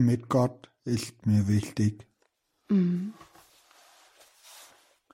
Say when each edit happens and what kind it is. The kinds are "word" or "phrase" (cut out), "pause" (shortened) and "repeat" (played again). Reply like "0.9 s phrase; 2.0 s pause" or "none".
none